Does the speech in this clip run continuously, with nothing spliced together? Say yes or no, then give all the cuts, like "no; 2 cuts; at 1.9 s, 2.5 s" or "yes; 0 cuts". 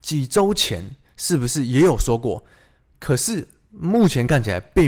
yes; 0 cuts